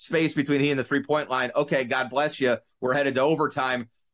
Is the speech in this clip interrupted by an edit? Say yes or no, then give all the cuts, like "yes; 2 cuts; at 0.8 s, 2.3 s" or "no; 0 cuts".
no; 0 cuts